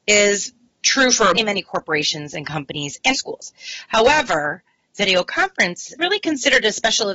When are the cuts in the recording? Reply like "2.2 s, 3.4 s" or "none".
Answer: 1.3 s, 3.1 s, 6.0 s

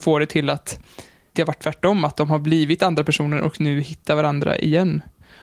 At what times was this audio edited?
1.3 s

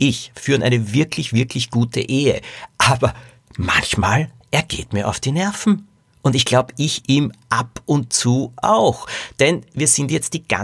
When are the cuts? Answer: none

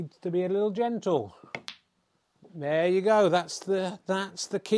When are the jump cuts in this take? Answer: none

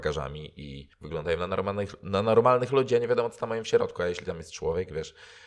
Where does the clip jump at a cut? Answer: 0.9 s

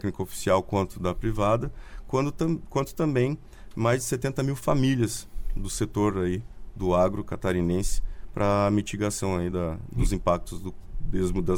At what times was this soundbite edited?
none

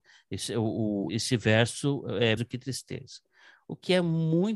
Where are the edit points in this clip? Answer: 1.1 s, 2.4 s

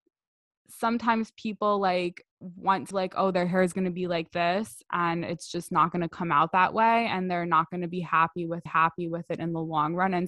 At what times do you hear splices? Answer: 2.3 s, 2.9 s, 8.7 s

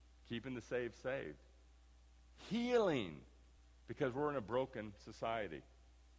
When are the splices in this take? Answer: 3.6 s

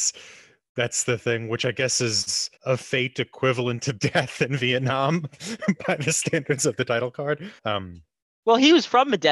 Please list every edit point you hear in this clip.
2.6 s, 7.6 s

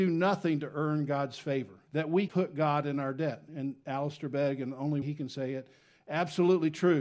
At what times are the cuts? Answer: 1.9 s, 2.3 s, 5.0 s

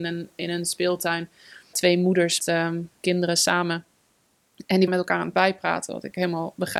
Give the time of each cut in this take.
1.7 s, 2.4 s, 3.0 s, 4.9 s, 5.3 s

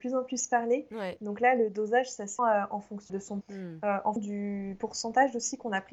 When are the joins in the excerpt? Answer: 2.4 s, 3.1 s, 3.4 s, 4.2 s

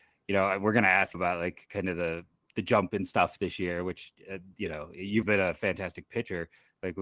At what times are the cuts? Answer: 1.1 s, 5.2 s

